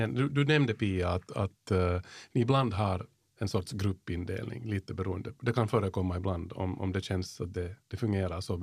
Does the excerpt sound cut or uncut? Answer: uncut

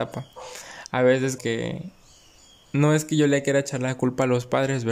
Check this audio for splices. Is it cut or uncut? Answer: cut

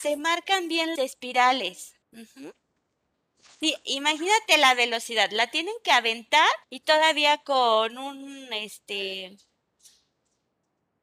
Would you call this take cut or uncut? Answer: cut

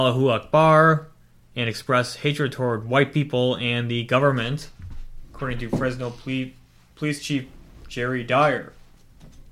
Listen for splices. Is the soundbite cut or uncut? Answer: uncut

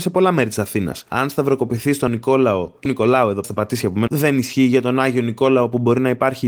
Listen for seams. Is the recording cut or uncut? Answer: cut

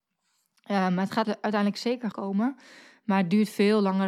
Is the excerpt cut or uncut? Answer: cut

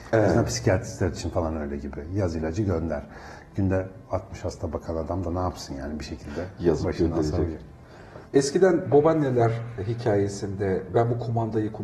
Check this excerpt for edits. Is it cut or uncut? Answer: uncut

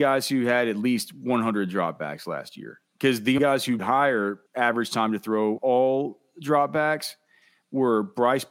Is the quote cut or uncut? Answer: cut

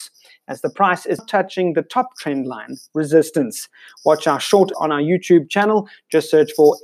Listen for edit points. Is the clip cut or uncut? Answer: cut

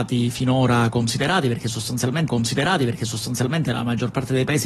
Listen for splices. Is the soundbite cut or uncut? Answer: cut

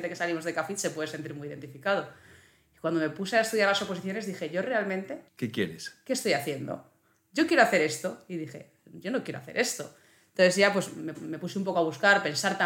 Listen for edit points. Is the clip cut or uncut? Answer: cut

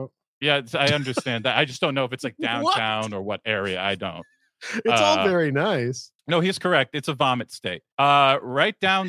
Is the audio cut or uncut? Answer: cut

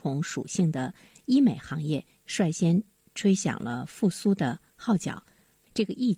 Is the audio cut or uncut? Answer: uncut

